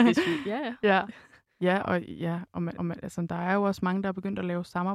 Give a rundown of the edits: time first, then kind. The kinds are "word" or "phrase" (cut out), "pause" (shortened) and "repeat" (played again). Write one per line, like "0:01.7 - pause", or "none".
0:02.8 - repeat

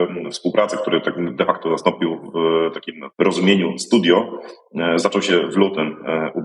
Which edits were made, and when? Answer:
0:03.1 - pause

